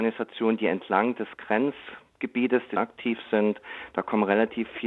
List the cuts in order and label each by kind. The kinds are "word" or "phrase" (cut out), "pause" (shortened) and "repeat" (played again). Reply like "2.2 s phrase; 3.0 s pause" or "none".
2.8 s phrase